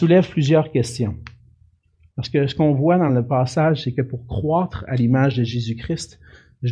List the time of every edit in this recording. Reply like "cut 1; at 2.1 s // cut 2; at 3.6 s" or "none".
none